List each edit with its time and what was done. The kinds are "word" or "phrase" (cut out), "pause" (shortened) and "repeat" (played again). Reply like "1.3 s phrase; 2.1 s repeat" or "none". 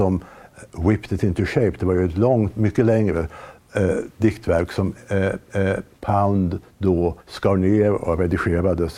5.5 s repeat; 7.2 s pause